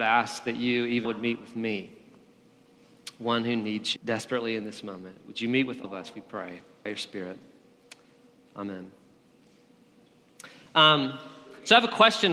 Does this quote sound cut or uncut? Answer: cut